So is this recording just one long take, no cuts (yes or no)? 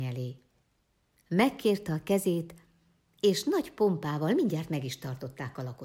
yes